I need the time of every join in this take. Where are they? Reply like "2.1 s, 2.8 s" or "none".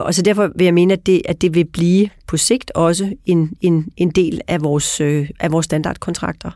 3.6 s